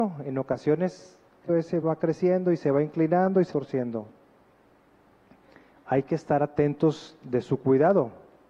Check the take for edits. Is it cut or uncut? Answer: cut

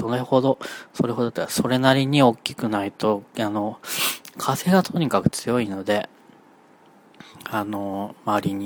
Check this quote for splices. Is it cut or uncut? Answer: cut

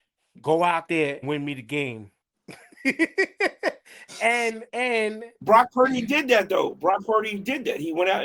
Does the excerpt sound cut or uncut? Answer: cut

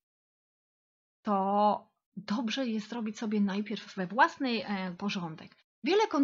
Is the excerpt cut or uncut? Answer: cut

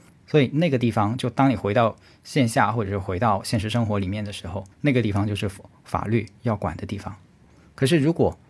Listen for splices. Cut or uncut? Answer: cut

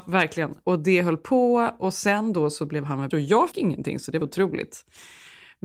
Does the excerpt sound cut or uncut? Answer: cut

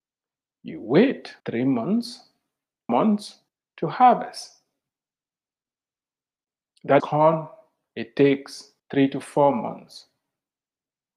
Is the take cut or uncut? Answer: cut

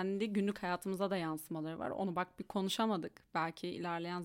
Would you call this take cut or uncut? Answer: uncut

